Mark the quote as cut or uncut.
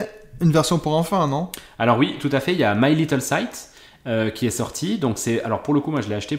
uncut